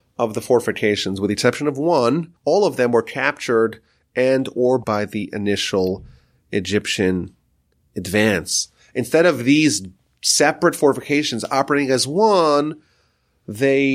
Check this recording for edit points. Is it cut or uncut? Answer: cut